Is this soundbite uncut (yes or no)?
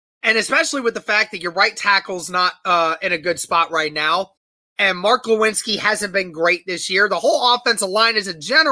yes